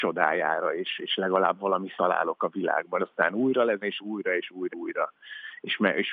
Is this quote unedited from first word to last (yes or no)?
no